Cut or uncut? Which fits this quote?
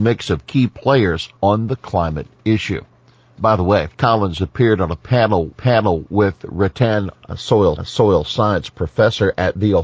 cut